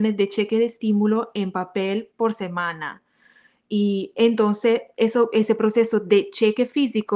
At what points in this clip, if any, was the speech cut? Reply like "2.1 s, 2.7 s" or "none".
none